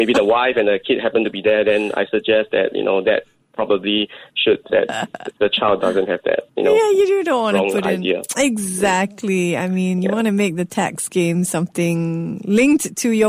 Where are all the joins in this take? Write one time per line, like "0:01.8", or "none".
0:04.7